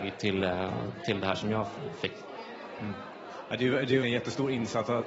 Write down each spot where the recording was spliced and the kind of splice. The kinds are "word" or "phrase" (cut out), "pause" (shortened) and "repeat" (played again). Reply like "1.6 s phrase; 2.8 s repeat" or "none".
4.0 s word